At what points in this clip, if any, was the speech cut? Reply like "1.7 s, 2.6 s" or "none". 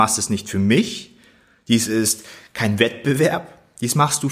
none